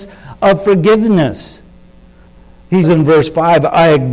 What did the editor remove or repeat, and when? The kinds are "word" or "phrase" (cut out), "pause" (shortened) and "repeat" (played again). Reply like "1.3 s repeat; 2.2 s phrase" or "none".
2.8 s word